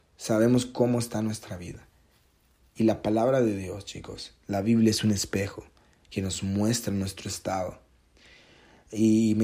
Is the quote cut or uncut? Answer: uncut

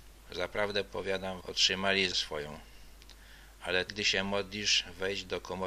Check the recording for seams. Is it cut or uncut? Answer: cut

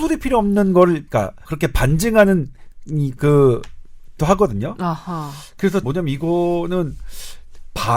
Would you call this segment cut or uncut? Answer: cut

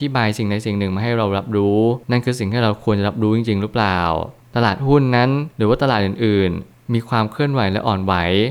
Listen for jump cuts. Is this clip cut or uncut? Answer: cut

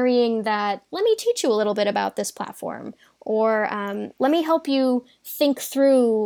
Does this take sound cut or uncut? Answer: uncut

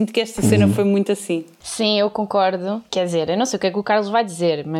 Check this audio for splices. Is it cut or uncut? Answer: uncut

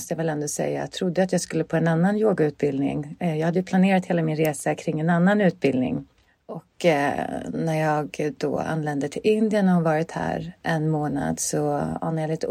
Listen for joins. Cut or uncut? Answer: cut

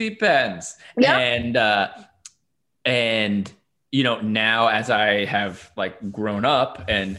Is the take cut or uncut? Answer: uncut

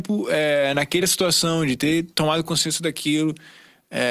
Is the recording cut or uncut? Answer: uncut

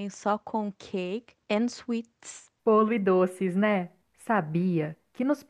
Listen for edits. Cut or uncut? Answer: cut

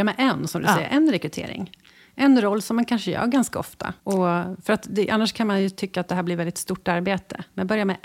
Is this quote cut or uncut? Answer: cut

